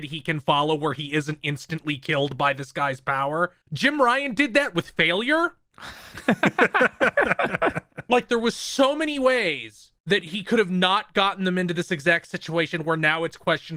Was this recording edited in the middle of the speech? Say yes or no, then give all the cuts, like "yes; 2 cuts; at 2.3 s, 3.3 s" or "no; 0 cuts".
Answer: yes; 2 cuts; at 3.6 s, 10.0 s